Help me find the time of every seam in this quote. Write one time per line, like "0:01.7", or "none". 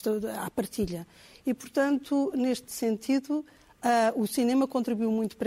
0:02.7